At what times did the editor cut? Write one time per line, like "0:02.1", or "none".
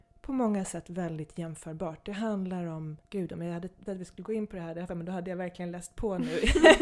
0:03.0
0:03.9
0:04.9